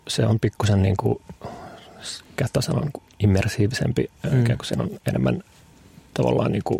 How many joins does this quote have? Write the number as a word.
zero